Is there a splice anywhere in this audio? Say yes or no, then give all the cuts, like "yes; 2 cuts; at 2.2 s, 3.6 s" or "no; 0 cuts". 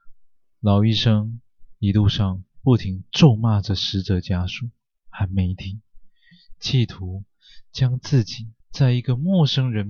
yes; 1 cut; at 8.6 s